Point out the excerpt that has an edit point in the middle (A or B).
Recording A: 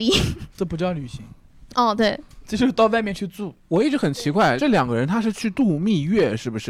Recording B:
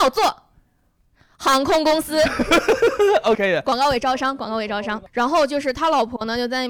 B